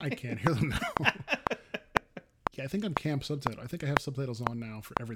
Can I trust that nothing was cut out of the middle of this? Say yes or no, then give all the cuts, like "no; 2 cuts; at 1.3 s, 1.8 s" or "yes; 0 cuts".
yes; 0 cuts